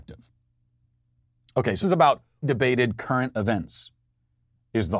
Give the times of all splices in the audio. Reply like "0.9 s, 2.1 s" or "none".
1.8 s, 2.4 s